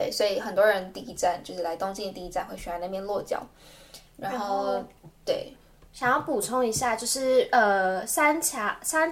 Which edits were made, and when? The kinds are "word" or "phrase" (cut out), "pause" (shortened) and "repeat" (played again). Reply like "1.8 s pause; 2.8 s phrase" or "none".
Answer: 4.1 s pause; 5.1 s pause